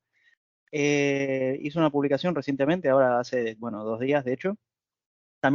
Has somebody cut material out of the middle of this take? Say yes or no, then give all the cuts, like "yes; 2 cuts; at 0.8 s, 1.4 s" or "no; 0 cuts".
no; 0 cuts